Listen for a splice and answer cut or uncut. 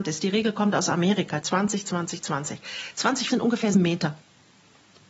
cut